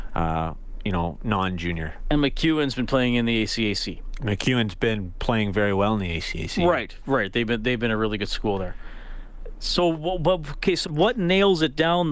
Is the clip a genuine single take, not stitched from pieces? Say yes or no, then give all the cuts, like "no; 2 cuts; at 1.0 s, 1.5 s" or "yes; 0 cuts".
no; 1 cut; at 10.8 s